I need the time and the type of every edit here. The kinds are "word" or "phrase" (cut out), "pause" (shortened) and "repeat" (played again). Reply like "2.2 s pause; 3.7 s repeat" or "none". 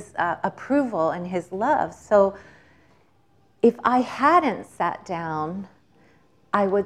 none